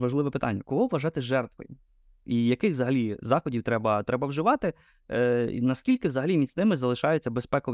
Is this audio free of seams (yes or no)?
yes